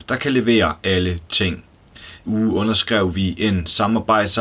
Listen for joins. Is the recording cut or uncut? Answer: cut